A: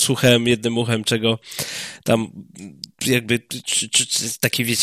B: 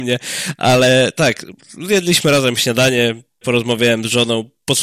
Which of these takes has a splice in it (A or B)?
B